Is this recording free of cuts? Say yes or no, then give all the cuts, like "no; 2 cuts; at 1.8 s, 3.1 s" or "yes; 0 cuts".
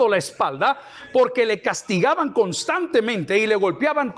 yes; 0 cuts